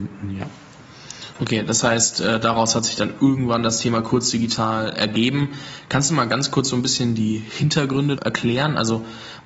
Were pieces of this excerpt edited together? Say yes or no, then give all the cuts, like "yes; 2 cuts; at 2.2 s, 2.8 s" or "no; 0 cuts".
yes; 1 cut; at 8.2 s